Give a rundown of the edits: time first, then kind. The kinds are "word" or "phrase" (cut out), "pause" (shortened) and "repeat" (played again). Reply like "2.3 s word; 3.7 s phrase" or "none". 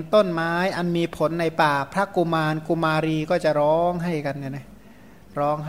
none